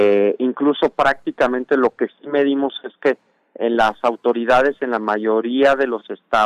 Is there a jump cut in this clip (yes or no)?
no